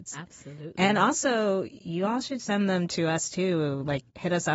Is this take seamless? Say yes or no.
yes